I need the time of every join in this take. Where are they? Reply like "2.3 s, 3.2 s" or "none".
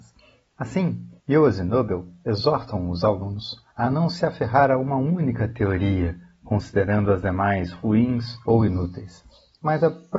1.2 s, 3.7 s, 8.4 s